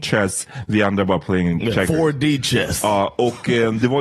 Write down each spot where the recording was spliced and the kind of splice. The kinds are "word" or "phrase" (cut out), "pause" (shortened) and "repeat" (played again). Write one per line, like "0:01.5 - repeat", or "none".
none